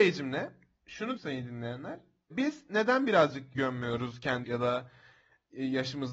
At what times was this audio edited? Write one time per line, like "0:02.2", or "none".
0:01.2
0:02.3
0:03.5
0:04.4